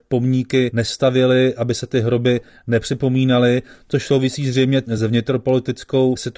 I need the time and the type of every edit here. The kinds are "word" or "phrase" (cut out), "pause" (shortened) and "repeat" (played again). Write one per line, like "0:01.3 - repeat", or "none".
none